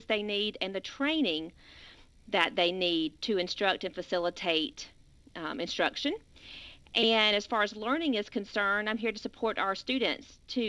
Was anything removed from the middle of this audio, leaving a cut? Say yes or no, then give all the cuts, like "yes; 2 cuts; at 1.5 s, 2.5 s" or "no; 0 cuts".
no; 0 cuts